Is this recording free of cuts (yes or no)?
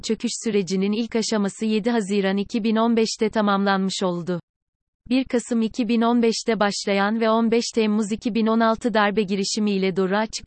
yes